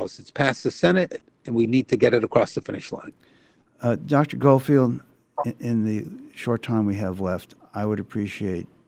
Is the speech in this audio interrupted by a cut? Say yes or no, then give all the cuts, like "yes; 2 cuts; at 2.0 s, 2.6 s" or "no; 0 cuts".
no; 0 cuts